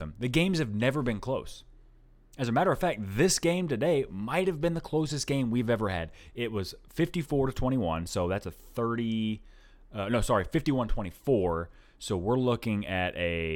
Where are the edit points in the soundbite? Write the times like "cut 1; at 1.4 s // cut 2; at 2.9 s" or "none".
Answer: none